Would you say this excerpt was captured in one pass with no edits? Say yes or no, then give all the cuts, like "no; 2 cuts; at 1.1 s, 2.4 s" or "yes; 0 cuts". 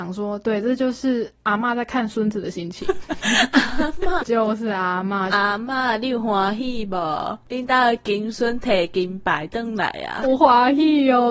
no; 1 cut; at 4.2 s